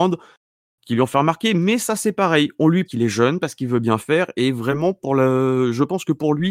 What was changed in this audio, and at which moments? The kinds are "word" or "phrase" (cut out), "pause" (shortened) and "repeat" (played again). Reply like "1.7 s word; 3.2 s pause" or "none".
2.9 s phrase